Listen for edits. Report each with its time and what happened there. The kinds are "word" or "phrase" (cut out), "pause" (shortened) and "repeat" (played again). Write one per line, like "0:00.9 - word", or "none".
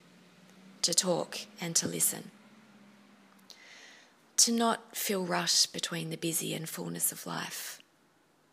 none